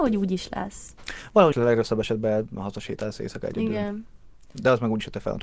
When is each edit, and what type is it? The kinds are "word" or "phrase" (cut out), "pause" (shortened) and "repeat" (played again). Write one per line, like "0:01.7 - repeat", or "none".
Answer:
0:01.5 - phrase